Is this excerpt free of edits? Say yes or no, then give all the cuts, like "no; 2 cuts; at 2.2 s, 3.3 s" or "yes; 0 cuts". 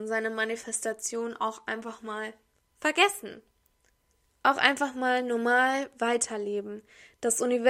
yes; 0 cuts